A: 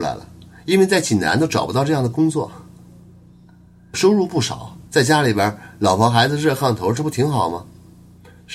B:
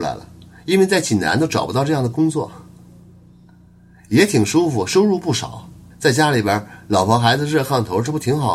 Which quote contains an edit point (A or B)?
A